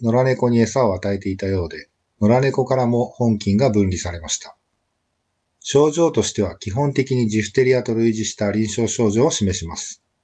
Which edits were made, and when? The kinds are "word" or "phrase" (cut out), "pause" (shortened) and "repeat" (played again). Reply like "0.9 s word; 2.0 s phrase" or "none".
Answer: none